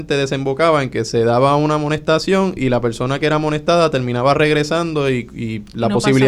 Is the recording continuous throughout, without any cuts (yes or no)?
yes